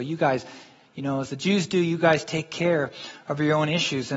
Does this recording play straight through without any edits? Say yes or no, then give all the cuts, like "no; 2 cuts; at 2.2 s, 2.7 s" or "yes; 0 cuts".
yes; 0 cuts